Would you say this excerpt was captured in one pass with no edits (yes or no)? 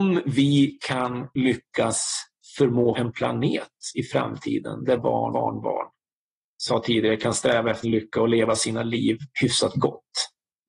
no